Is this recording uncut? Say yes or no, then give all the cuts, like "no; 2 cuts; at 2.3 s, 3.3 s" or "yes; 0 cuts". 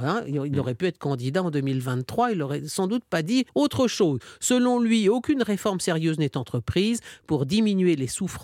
no; 1 cut; at 3.5 s